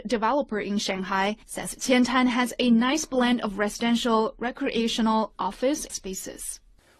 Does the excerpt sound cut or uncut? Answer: cut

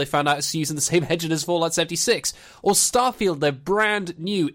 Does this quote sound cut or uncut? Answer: uncut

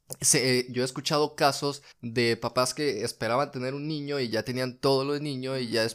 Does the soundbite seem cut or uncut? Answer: cut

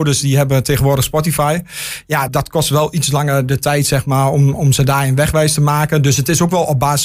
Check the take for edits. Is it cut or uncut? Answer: cut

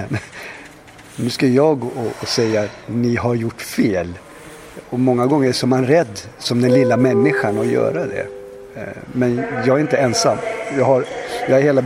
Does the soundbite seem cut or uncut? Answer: uncut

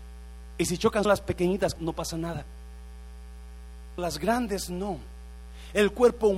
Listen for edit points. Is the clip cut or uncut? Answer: cut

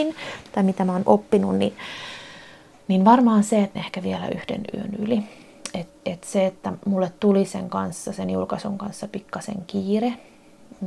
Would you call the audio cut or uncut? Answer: cut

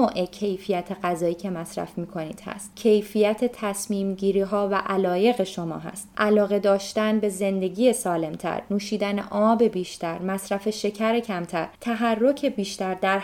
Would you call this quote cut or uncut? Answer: uncut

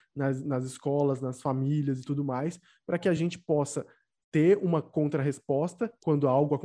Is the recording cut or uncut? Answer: uncut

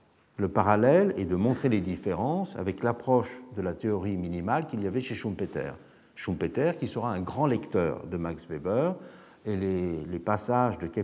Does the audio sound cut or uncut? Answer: uncut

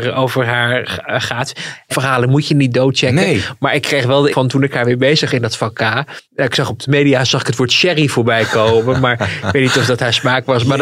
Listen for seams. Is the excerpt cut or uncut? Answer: cut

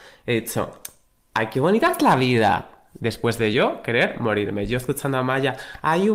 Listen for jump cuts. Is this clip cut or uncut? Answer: uncut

